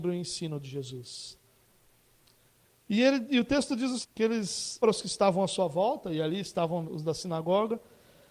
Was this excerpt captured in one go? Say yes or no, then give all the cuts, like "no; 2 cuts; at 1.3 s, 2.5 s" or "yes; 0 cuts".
no; 3 cuts; at 4.0 s, 4.8 s, 6.8 s